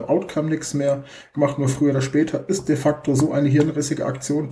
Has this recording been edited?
no; 0 cuts

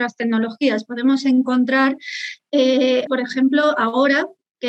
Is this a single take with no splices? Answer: no; 1 cut; at 3.1 s

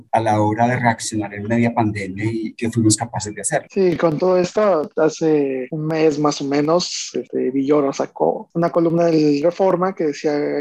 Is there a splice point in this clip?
no; 0 cuts

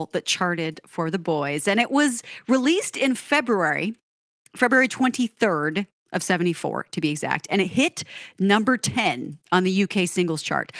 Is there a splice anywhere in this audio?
no; 0 cuts

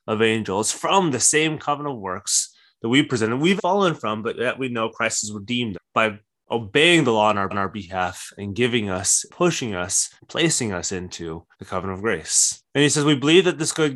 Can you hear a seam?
yes; 7 cuts; at 3.6 s, 5.7 s, 7.5 s, 9.3 s, 10.2 s, 11.5 s, 12.7 s

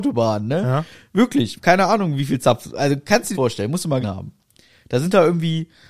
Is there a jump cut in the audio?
yes; 3 cuts; at 1.6 s, 3.3 s, 4.0 s

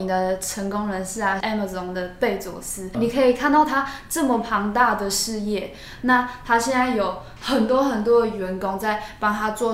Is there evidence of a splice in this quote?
yes; 2 cuts; at 1.4 s, 2.9 s

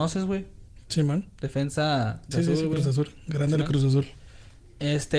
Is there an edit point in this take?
yes; 1 cut; at 2.3 s

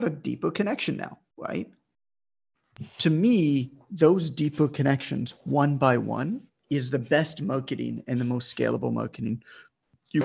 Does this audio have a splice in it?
yes; 2 cuts; at 1.3 s, 6.5 s

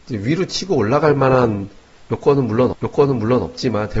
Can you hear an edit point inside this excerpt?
yes; 1 cut; at 2.7 s

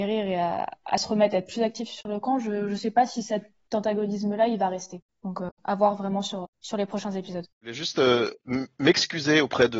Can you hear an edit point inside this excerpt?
yes; 4 cuts; at 5.1 s, 5.6 s, 6.5 s, 7.5 s

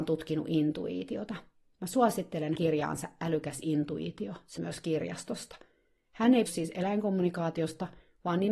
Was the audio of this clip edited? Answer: yes; 3 cuts; at 2.6 s, 4.6 s, 6.5 s

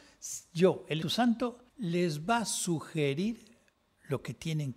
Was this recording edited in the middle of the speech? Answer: yes; 2 cuts; at 1.0 s, 1.7 s

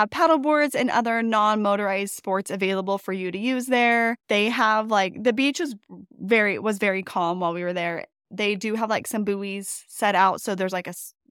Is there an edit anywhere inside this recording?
yes; 2 cuts; at 4.2 s, 6.1 s

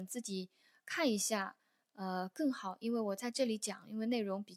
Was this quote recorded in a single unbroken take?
yes; 0 cuts

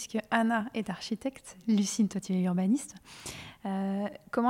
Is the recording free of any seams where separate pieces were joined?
yes; 0 cuts

